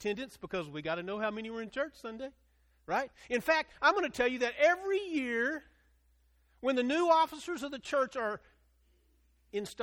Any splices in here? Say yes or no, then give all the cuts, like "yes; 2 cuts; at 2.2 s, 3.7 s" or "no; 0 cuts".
no; 0 cuts